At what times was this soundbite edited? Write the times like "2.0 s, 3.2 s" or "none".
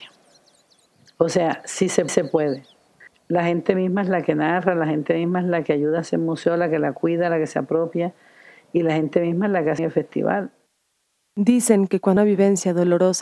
2.1 s, 9.8 s, 12.2 s